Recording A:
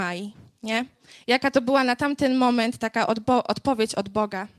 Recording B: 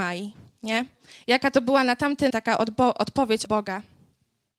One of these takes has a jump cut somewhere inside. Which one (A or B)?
B